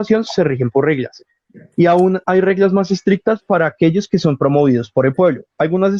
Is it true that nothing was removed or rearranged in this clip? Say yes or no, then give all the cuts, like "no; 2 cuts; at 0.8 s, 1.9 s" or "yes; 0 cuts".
yes; 0 cuts